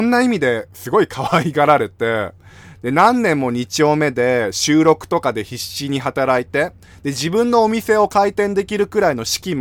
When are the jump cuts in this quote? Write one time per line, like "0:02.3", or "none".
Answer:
none